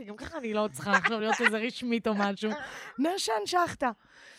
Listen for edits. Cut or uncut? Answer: uncut